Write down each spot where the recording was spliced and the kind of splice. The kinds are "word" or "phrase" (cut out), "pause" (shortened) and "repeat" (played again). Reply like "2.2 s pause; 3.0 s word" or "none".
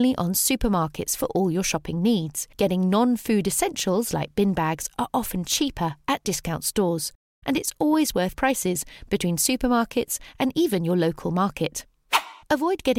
8.3 s word

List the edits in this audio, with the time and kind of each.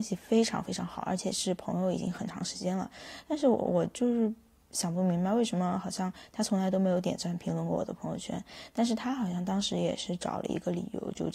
none

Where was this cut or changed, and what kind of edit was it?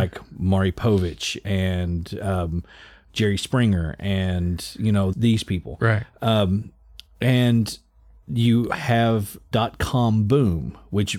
5.1 s word; 9.5 s word

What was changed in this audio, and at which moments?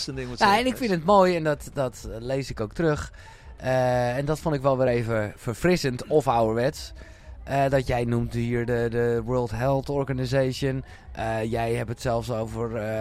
none

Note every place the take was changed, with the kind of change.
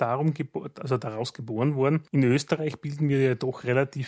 2.1 s pause

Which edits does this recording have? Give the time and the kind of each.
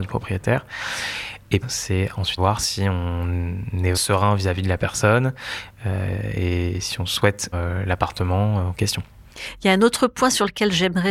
1.6 s phrase; 2.4 s word; 3.9 s word; 7.5 s word

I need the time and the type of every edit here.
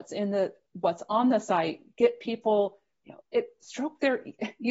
3.2 s word

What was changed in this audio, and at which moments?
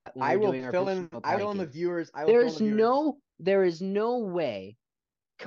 1.4 s word

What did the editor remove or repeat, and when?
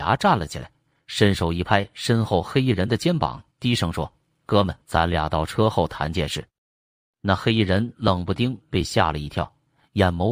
3.5 s pause; 4.9 s pause; 7.0 s pause

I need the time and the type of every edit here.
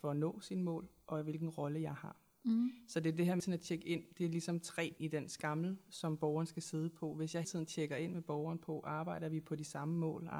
3.4 s word; 5.0 s word; 7.4 s word

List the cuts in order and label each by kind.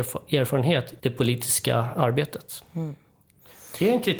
1.0 s word

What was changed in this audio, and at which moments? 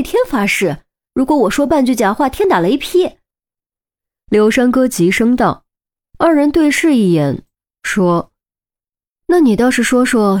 none

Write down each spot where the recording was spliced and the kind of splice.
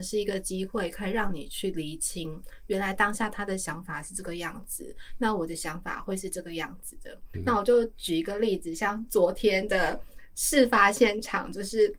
7.3 s word

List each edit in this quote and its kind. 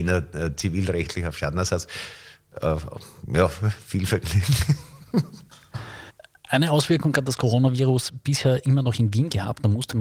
none

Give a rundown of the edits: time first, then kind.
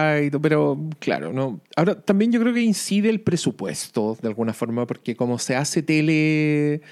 1.7 s pause

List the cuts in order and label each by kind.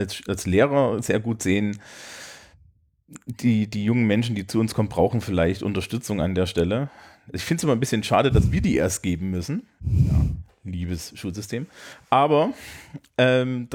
none

